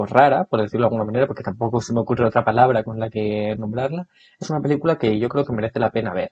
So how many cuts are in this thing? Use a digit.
0